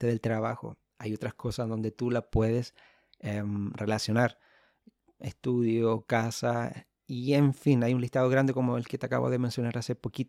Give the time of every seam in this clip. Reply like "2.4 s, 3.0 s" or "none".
none